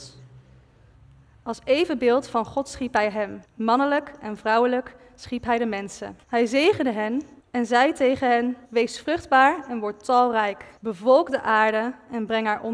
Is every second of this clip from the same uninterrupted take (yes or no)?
no